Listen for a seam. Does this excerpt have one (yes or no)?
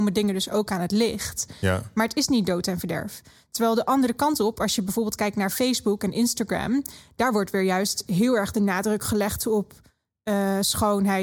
no